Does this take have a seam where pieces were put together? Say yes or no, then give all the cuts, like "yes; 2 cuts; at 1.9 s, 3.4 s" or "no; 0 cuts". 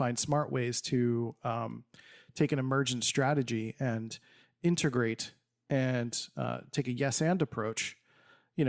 no; 0 cuts